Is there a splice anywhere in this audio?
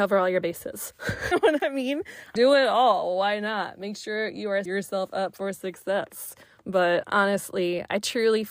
yes; 4 cuts; at 1.3 s, 2.4 s, 4.7 s, 6.4 s

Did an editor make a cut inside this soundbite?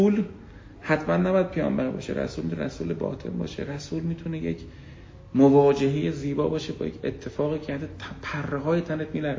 no; 0 cuts

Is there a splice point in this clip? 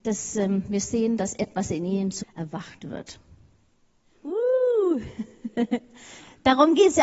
yes; 1 cut; at 2.2 s

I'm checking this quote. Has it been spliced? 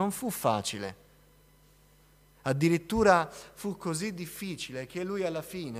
no; 0 cuts

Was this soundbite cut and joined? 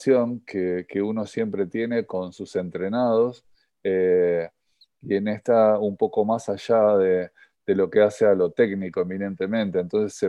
no; 0 cuts

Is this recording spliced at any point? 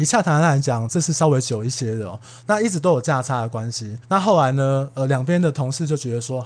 yes; 1 cut; at 4.0 s

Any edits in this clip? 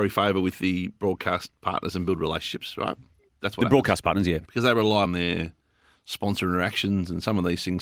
yes; 4 cuts; at 0.9 s, 3.2 s, 4.4 s, 5.0 s

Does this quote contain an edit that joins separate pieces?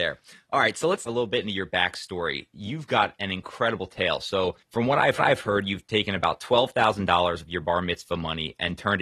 yes; 3 cuts; at 1.1 s, 4.6 s, 5.2 s

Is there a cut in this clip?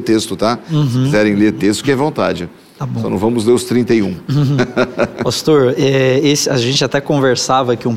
no; 0 cuts

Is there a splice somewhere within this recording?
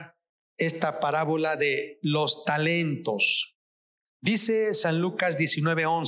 no; 0 cuts

